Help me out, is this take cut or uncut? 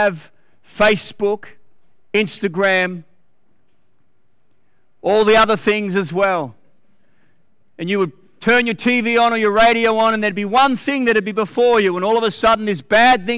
uncut